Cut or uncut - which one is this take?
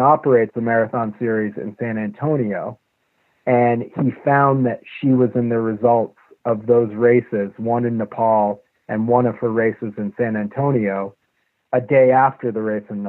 uncut